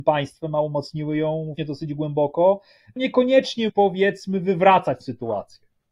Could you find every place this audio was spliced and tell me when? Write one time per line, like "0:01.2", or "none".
0:01.6
0:03.0
0:03.7
0:05.0